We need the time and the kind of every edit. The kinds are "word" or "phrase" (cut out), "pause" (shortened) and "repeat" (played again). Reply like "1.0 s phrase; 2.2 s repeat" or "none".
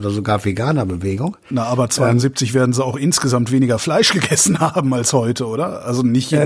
none